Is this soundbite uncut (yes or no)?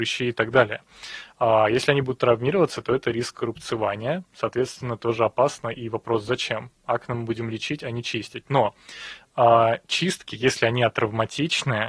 yes